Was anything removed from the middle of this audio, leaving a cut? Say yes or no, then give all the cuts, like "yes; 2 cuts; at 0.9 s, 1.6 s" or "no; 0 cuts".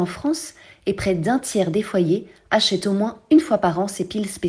no; 0 cuts